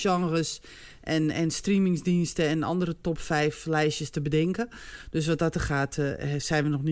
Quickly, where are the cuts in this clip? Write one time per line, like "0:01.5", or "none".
none